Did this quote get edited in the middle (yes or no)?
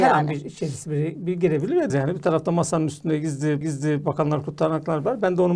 yes